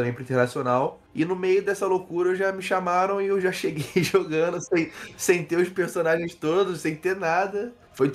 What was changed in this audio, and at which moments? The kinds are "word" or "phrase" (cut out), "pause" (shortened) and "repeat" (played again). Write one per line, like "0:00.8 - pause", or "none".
none